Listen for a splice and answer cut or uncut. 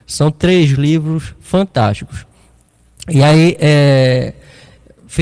uncut